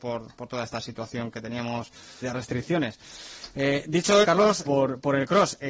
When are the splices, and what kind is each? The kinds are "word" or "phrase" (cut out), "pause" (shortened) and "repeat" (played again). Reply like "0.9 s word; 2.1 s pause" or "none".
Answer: 2.2 s word; 4.2 s word; 4.6 s phrase